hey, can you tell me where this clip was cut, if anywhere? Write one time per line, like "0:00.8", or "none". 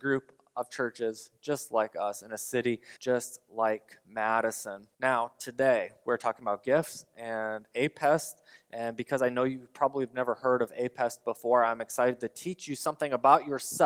0:03.0
0:04.9

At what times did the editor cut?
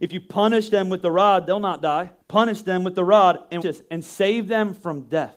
0:02.2
0:03.6

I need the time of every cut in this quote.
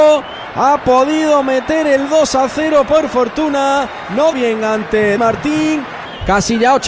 0:04.3
0:05.2

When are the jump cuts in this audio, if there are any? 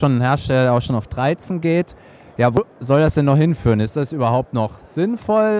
none

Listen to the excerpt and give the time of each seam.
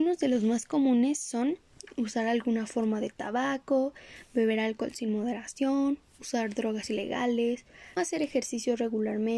0:08.0

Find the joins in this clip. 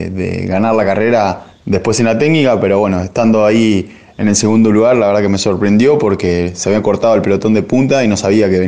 none

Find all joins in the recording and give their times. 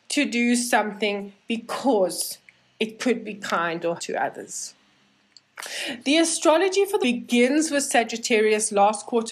0:04.0
0:07.0

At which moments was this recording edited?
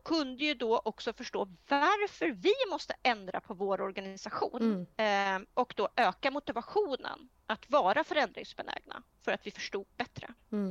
0:04.9
0:07.4

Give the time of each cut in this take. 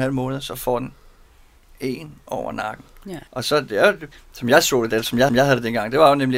0:03.3
0:04.1
0:04.9
0:05.3

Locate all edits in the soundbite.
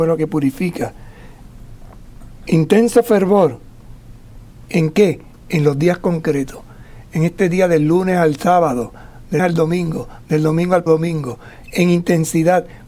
0:09.4
0:10.9
0:11.6

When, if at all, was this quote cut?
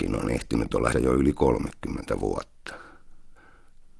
0:00.9

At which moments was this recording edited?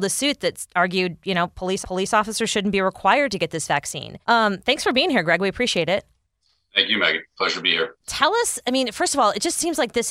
0:01.8
0:04.2

